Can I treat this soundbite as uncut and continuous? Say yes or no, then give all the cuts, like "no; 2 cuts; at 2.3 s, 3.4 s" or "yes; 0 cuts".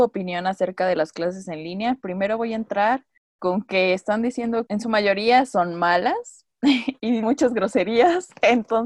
no; 3 cuts; at 3.4 s, 4.7 s, 7.2 s